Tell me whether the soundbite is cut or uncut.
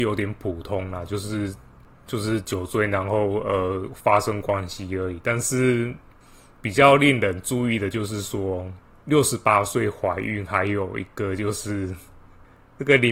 uncut